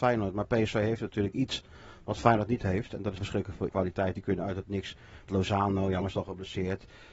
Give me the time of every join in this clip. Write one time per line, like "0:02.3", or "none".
0:03.2
0:03.7
0:05.3
0:06.0